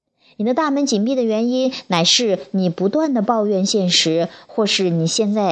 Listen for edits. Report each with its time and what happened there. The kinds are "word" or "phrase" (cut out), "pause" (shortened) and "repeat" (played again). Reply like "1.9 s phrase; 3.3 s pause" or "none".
none